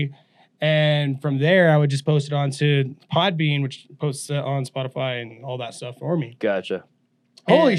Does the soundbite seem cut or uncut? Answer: cut